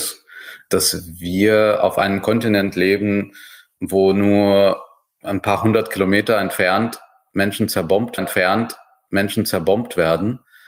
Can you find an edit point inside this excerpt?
yes; 1 cut; at 8.2 s

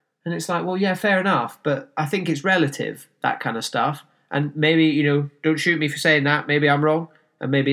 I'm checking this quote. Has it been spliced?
no; 0 cuts

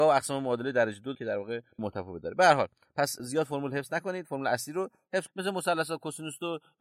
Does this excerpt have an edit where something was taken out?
yes; 3 cuts; at 1.1 s, 1.8 s, 5.3 s

